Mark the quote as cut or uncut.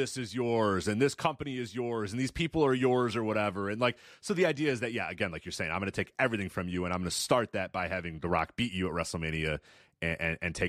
uncut